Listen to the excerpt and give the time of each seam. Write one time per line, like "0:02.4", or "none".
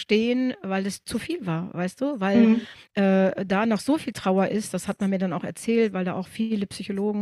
none